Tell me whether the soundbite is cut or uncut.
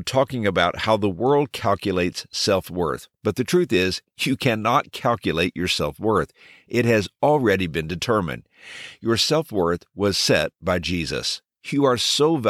cut